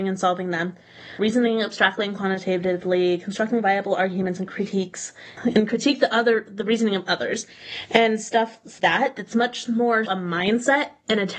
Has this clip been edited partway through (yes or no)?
yes